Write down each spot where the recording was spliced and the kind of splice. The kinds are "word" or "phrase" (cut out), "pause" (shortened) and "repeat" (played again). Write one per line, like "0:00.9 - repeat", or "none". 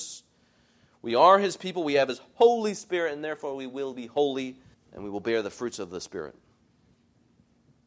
0:04.7 - pause